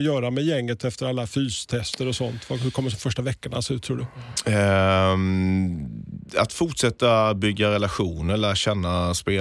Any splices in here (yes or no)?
no